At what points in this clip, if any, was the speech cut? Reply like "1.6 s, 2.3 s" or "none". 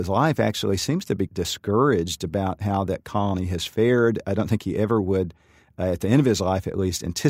1.3 s

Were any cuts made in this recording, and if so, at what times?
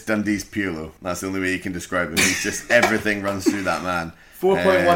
1.0 s

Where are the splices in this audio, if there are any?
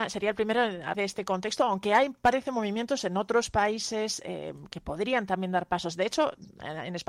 0.9 s

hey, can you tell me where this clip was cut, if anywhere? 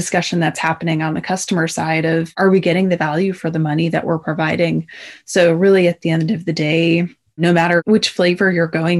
none

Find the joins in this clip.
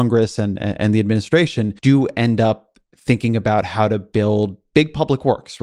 1.8 s

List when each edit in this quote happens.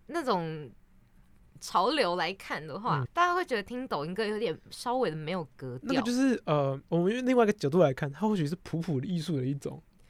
3.1 s

